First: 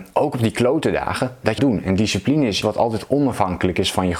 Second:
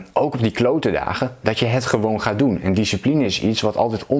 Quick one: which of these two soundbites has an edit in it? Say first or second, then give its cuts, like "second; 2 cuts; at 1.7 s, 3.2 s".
first; 2 cuts; at 1.6 s, 2.6 s